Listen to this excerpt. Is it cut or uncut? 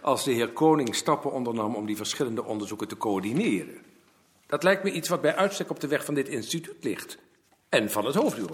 uncut